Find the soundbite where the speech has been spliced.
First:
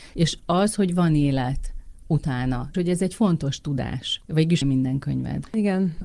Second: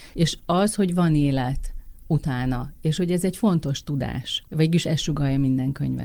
first; 2 cuts; at 2.7 s, 4.6 s

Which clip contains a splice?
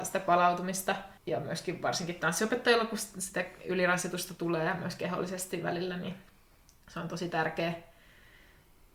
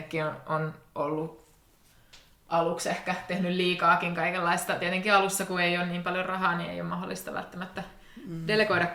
first; 1 cut; at 1.2 s

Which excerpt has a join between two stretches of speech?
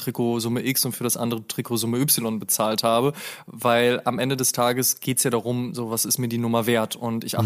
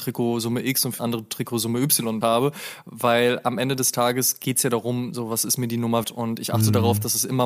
second; 3 cuts; at 1.0 s, 2.2 s, 6.0 s

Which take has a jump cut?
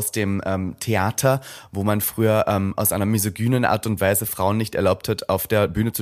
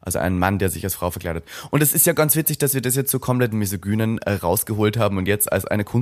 second; 1 cut; at 3.5 s

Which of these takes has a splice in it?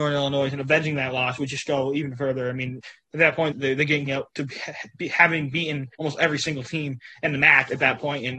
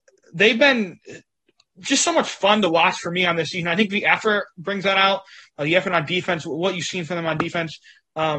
first; 3 cuts; at 3.5 s, 4.1 s, 5.9 s

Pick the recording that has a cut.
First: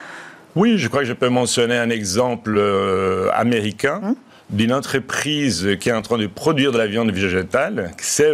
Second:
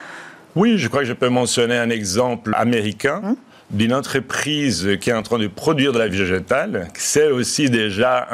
second; 2 cuts; at 2.5 s, 6.1 s

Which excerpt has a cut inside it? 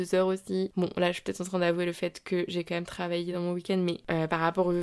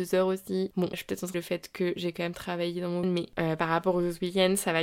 second; 3 cuts; at 0.9 s, 1.3 s, 3.0 s

